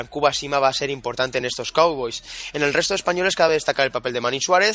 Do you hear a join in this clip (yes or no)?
no